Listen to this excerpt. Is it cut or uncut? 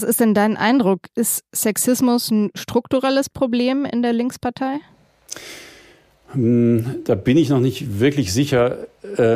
uncut